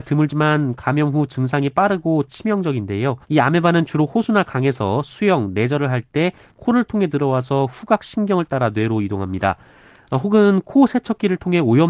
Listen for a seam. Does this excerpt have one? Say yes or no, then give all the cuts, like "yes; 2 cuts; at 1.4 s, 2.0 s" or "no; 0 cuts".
yes; 1 cut; at 3.2 s